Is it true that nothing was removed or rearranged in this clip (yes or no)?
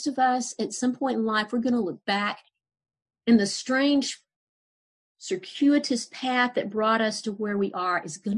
yes